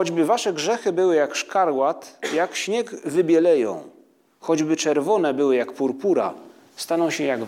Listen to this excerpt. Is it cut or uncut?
uncut